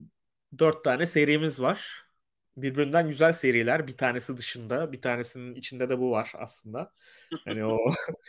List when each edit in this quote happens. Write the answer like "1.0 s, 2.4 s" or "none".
none